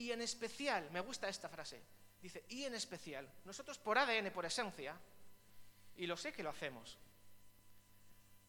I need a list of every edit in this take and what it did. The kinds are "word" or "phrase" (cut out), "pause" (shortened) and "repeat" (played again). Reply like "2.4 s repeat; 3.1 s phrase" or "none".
none